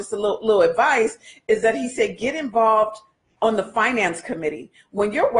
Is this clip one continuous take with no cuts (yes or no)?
yes